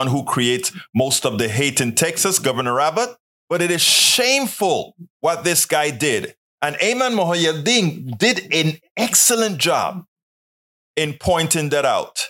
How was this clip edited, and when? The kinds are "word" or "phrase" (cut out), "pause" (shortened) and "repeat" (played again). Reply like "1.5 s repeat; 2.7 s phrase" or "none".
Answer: 3.2 s pause; 5.1 s pause